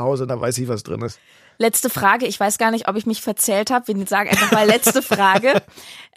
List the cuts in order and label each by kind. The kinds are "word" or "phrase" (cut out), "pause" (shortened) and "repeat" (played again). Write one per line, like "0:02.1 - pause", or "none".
none